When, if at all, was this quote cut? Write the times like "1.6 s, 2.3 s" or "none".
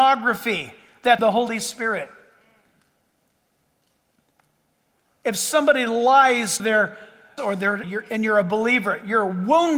1.2 s, 6.6 s, 7.4 s, 7.8 s